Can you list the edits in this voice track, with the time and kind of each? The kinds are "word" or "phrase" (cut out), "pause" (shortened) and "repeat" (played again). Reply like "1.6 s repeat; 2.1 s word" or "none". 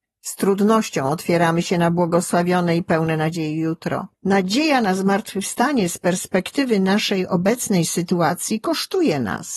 4.1 s pause